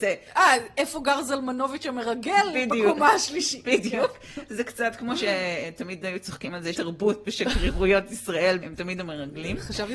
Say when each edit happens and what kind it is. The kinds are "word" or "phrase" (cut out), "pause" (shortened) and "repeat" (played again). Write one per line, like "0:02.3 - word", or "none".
0:06.7 - word
0:08.6 - phrase

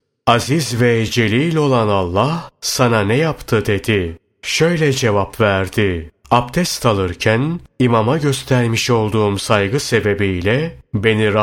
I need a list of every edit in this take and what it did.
none

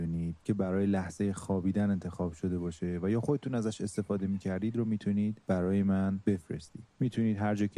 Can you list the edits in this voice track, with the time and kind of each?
none

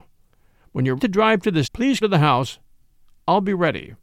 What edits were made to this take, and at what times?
0:01.0 - word
0:01.6 - word
0:02.0 - word

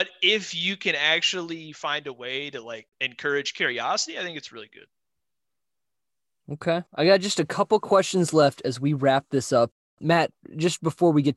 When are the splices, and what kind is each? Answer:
0:02.9 - pause
0:06.9 - pause

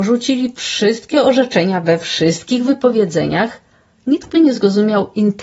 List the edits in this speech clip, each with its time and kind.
none

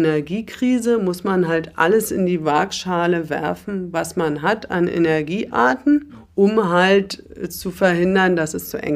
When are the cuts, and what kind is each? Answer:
none

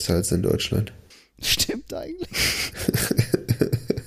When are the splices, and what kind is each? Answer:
0:01.1 - pause

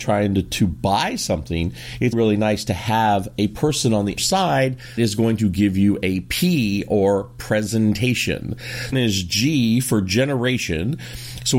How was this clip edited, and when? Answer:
0:02.1 - word
0:04.2 - word
0:05.0 - word
0:08.9 - phrase

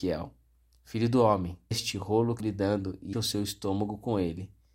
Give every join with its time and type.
0:01.7 - word
0:02.4 - word
0:03.1 - word

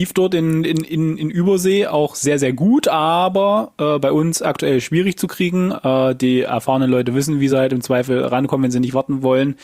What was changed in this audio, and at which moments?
none

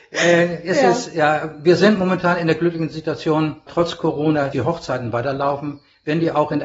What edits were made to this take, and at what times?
0:03.7 - word
0:04.5 - word

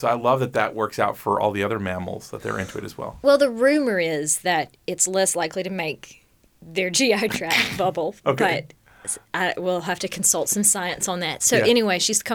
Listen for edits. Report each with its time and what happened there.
none

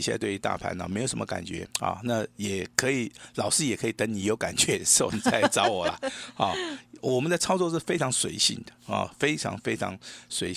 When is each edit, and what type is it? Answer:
0:01.7 - pause

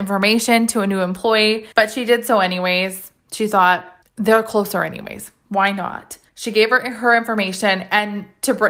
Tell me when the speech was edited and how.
0:01.7 - pause
0:04.0 - pause
0:06.3 - pause

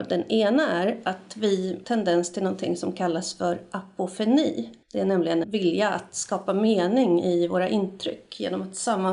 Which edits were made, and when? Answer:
0:01.8 - phrase
0:04.8 - pause
0:05.4 - word

